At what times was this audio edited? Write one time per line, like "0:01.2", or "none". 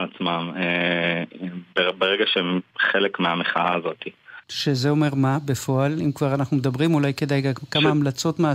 0:04.4